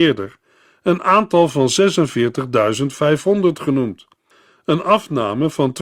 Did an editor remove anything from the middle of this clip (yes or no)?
no